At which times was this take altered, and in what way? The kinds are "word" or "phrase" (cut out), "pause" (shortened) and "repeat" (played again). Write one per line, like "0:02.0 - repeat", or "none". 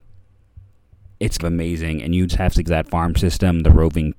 0:01.4 - word
0:02.3 - word
0:02.6 - word